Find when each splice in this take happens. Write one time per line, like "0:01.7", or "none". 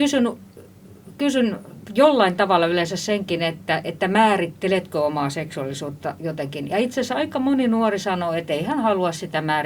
none